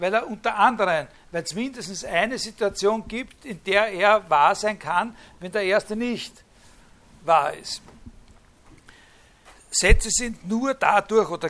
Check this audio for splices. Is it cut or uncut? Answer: uncut